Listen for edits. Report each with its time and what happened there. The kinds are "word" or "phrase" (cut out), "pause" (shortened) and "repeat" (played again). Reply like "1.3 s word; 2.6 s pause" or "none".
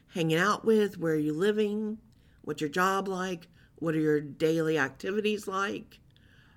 none